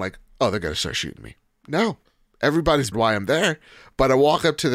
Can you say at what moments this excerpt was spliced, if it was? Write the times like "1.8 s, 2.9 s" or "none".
2.9 s